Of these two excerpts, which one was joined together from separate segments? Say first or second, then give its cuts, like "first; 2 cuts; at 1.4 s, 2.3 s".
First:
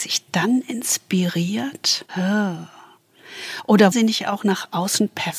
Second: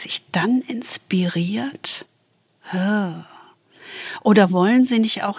first; 2 cuts; at 2.1 s, 3.9 s